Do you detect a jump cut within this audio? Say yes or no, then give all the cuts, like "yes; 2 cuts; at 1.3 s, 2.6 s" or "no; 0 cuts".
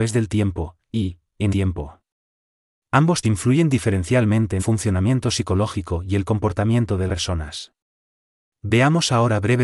yes; 4 cuts; at 1.5 s, 3.2 s, 4.6 s, 7.1 s